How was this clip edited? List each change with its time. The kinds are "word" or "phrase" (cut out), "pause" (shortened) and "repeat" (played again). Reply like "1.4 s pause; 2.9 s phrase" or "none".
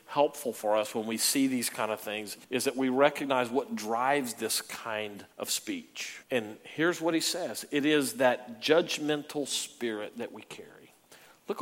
2.4 s pause; 5.3 s pause; 6.2 s pause